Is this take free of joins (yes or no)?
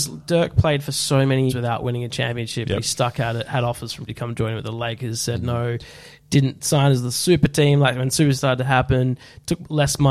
no